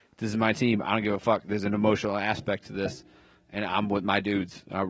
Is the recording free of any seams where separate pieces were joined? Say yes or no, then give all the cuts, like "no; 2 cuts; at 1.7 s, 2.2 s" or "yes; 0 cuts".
yes; 0 cuts